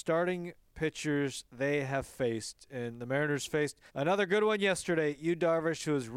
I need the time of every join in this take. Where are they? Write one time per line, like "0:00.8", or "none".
0:03.9